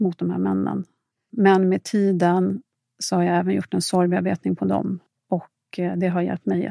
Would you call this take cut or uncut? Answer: uncut